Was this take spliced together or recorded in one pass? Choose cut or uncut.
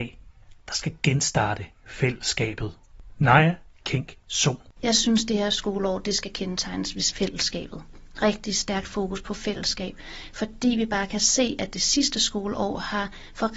uncut